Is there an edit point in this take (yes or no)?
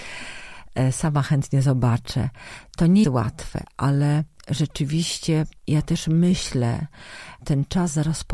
yes